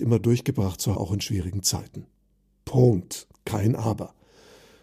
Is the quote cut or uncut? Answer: cut